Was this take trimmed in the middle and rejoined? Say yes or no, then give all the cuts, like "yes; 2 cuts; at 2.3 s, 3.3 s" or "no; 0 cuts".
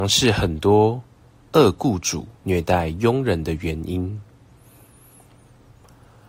yes; 1 cut; at 2.4 s